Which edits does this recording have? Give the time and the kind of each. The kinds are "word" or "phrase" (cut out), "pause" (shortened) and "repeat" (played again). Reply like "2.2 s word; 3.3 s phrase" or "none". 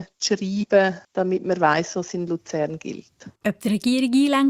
1.0 s pause; 3.4 s pause